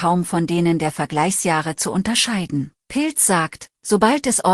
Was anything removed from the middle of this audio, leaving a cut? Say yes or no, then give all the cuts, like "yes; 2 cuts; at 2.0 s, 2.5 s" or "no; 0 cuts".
yes; 1 cut; at 2.8 s